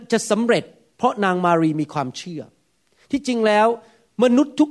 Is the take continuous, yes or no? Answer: yes